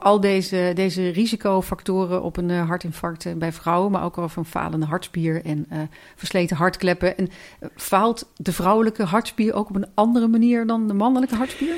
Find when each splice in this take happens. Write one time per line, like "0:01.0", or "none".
none